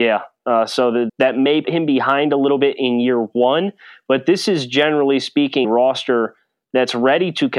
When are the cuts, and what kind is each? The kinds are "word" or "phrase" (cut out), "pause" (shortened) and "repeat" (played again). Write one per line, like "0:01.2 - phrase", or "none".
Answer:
0:01.1 - word
0:01.6 - word
0:05.6 - word